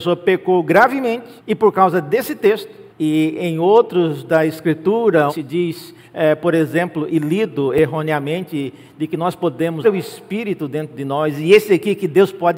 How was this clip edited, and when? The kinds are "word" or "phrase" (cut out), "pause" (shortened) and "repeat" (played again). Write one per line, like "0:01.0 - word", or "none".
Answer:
0:01.4 - pause
0:02.9 - pause
0:05.3 - word
0:06.0 - pause
0:07.1 - word
0:09.8 - word